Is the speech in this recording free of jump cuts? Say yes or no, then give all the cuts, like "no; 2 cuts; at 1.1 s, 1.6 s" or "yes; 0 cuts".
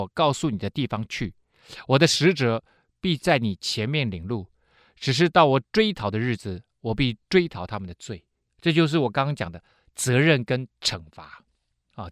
yes; 0 cuts